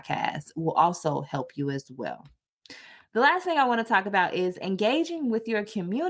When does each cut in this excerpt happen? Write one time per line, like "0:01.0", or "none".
none